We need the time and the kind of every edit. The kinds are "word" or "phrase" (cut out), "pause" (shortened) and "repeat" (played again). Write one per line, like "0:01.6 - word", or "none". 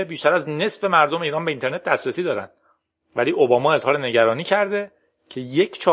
none